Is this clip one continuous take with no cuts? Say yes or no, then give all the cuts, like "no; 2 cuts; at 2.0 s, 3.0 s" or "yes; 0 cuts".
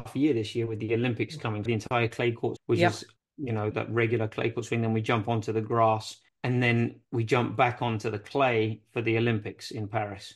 no; 6 cuts; at 1.7 s, 2.6 s, 3.2 s, 3.7 s, 6.3 s, 7.0 s